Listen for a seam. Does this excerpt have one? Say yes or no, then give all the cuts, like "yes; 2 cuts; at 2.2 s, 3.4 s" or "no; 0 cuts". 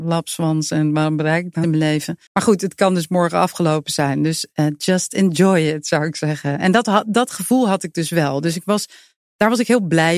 yes; 2 cuts; at 1.6 s, 2.3 s